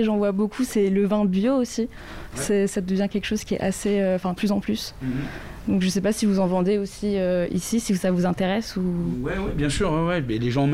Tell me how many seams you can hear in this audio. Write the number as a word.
one